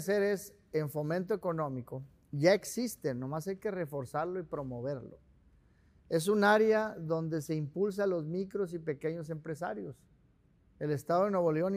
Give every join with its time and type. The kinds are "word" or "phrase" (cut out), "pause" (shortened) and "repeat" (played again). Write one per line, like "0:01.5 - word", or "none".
none